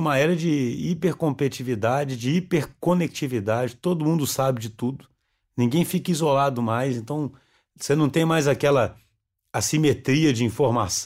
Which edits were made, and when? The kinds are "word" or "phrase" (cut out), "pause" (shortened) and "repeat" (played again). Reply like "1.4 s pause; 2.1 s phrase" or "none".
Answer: none